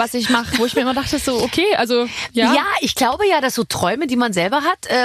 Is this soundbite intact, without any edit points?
yes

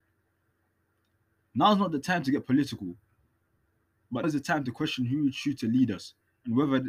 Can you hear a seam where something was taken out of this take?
yes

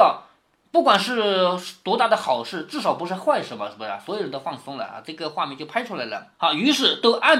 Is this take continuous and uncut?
no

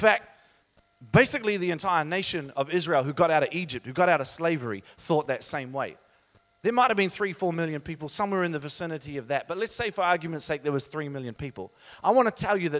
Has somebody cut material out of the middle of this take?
no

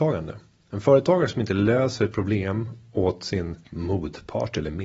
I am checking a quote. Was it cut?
yes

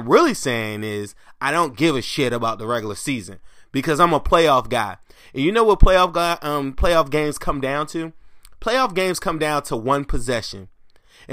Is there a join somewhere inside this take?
no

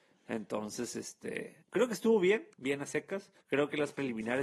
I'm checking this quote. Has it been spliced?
yes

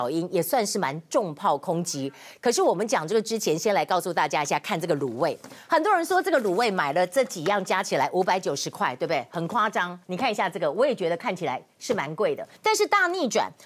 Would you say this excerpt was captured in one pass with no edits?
no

